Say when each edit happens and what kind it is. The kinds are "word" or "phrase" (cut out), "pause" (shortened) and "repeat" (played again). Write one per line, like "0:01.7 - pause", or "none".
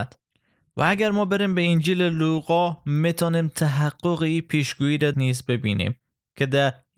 0:05.1 - phrase